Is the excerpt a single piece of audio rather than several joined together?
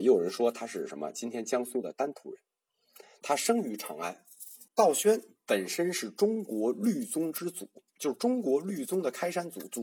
no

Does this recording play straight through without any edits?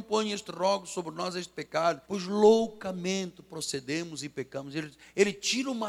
no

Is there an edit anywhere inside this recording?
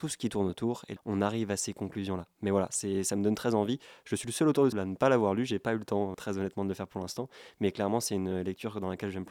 yes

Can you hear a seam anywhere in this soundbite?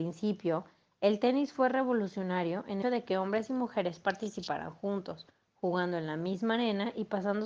yes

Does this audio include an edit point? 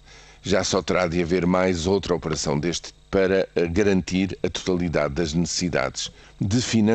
yes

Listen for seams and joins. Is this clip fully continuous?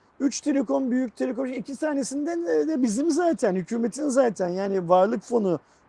yes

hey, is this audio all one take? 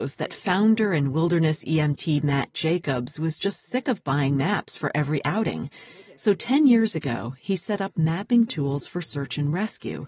yes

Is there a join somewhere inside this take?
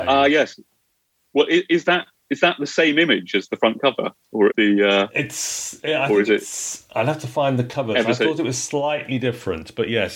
yes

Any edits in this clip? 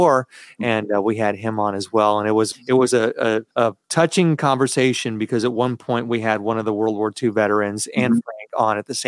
yes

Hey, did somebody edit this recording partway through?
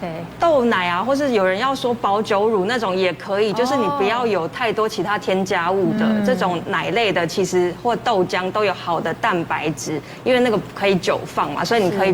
no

